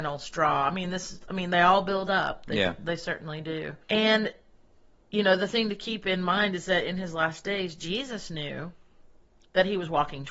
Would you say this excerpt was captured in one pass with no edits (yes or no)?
no